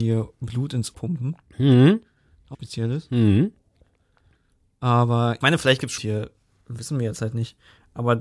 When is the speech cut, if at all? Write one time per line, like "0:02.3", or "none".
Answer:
0:00.9
0:02.5
0:05.4
0:06.0